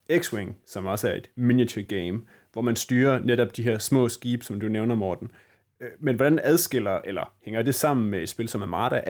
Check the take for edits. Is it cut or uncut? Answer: uncut